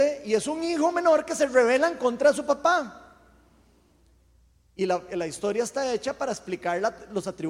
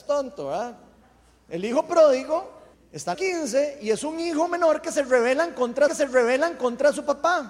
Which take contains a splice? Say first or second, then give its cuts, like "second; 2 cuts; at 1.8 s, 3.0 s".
second; 3 cuts; at 2.7 s, 3.1 s, 5.9 s